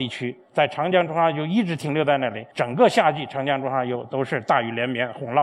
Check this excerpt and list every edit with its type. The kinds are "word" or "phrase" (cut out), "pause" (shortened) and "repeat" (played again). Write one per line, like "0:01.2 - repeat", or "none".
0:02.5 - pause